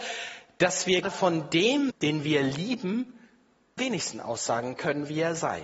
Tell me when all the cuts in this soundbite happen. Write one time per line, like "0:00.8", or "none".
0:01.0
0:01.9
0:03.8